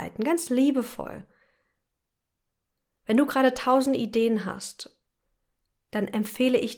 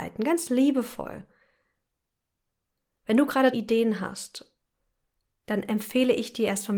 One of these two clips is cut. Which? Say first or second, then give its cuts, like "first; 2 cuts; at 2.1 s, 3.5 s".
second; 1 cut; at 3.5 s